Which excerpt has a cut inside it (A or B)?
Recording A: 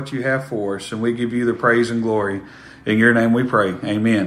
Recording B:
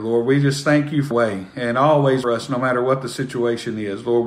B